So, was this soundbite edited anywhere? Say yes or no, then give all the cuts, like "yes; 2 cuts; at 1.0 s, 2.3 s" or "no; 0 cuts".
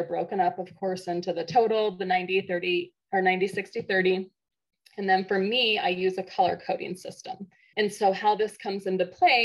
yes; 1 cut; at 7.7 s